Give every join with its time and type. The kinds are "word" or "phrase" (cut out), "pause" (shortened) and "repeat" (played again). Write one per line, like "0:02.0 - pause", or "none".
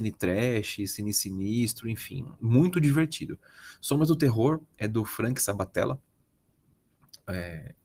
none